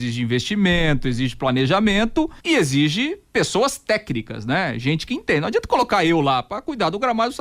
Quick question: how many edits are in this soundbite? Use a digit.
1